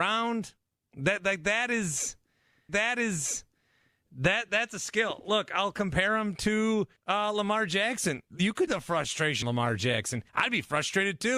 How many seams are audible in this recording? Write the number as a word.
five